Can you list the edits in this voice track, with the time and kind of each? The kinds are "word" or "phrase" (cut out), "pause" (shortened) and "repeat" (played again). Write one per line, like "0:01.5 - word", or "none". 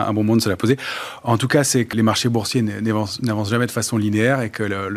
0:01.9 - word